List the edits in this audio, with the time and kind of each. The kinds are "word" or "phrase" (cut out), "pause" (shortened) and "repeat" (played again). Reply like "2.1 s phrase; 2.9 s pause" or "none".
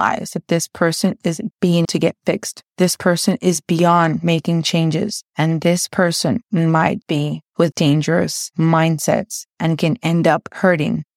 1.5 s word; 1.8 s word; 2.7 s pause; 7.0 s word; 7.7 s word